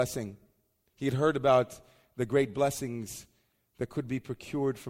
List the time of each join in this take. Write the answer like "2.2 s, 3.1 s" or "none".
none